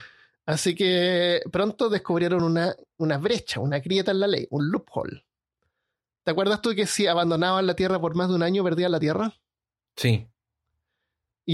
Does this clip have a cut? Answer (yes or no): no